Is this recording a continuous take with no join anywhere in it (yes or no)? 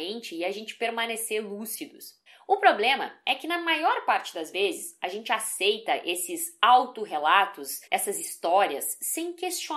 no